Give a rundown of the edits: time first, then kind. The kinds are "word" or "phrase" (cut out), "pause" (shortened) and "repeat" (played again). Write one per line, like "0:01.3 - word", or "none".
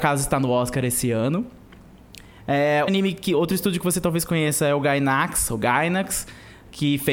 0:02.9 - word